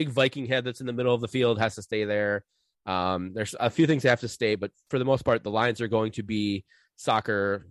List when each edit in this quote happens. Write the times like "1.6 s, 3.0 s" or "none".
none